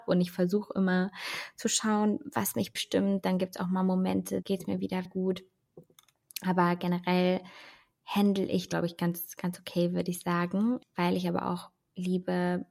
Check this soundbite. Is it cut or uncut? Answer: cut